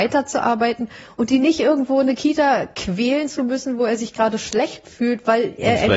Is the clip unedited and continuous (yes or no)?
yes